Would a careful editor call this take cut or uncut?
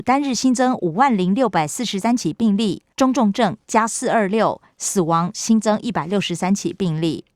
cut